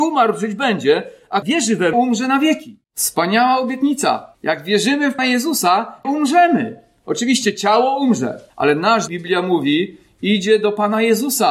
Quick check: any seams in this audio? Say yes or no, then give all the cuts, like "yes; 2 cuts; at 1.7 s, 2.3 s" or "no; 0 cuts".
yes; 8 cuts; at 1.4 s, 1.9 s, 2.8 s, 4.3 s, 5.2 s, 6.0 s, 8.5 s, 9.1 s